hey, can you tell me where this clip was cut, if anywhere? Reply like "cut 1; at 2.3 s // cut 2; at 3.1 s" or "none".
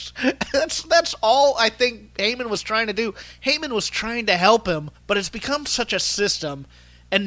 cut 1; at 5.0 s